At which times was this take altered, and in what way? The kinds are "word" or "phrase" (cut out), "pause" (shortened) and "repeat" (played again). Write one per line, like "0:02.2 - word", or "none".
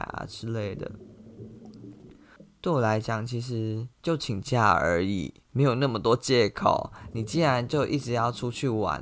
0:03.9 - pause
0:05.4 - pause